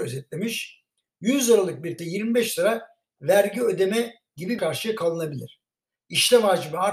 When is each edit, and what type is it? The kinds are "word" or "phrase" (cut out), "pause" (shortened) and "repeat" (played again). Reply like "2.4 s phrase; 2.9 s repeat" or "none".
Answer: 2.0 s phrase; 4.6 s phrase